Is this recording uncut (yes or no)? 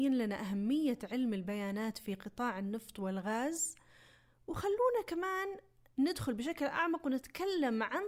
yes